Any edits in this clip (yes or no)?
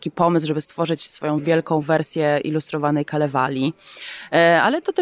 no